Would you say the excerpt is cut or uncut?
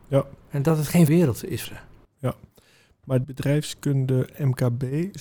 cut